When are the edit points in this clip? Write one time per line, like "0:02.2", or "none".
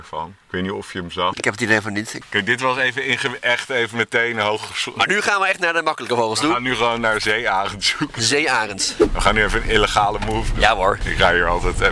none

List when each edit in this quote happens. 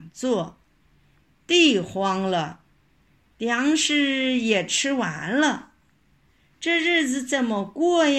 none

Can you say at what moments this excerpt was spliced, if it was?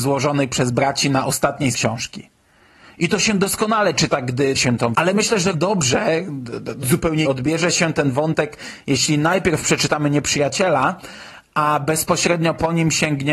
0:01.7
0:04.5
0:04.9
0:05.5
0:06.8
0:07.2

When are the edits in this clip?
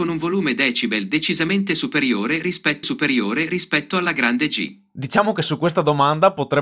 0:02.8

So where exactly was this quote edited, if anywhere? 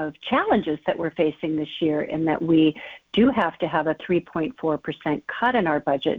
none

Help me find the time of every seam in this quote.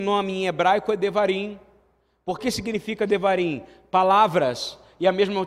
0:02.4

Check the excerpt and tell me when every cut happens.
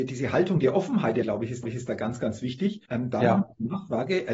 0:01.2
0:01.6
0:02.9

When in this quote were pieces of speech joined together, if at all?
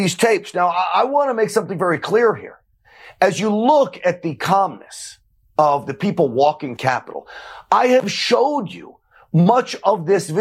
0:06.8

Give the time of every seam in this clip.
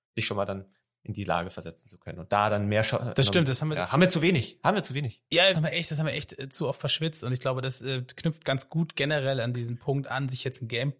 0:05.5

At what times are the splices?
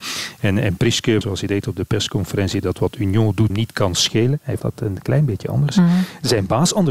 0:01.2
0:03.5
0:04.6

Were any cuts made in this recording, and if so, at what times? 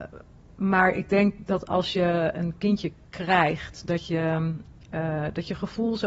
none

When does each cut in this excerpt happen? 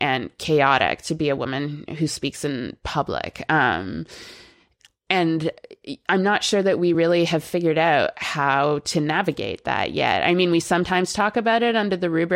none

